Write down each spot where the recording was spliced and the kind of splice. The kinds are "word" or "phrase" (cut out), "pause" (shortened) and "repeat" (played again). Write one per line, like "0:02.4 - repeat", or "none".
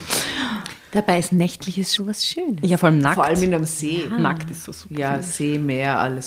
0:02.0 - word